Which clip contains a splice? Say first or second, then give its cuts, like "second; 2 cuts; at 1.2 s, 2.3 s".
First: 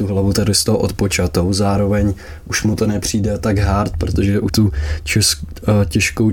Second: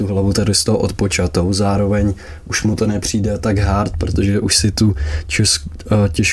first; 1 cut; at 4.5 s